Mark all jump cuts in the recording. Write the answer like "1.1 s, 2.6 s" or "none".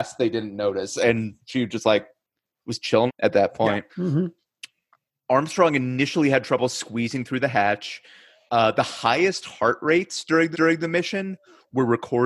1.4 s, 3.1 s, 3.9 s, 10.5 s